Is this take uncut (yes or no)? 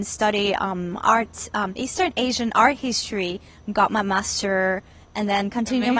yes